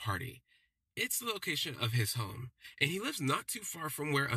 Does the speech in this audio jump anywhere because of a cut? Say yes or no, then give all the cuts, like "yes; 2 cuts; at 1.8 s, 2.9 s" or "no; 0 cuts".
no; 0 cuts